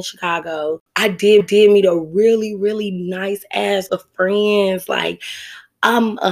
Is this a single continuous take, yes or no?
no